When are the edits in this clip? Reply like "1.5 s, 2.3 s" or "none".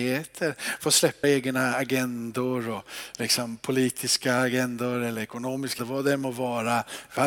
1.2 s, 5.8 s